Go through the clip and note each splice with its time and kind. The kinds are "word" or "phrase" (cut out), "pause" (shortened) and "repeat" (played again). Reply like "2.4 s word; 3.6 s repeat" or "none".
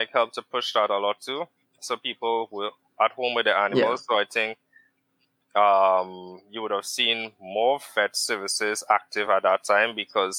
none